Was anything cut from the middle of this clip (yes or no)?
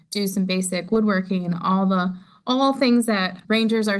no